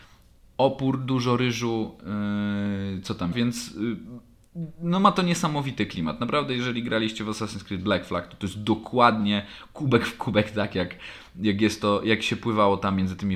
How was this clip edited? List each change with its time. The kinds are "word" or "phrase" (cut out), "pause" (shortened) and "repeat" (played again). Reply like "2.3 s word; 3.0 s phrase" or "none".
3.3 s phrase

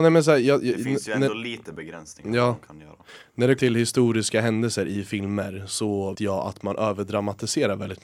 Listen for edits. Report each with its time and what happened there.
3.6 s word; 6.1 s word

